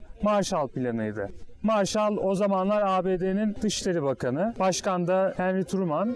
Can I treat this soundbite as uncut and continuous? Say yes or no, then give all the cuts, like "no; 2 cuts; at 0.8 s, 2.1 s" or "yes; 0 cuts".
yes; 0 cuts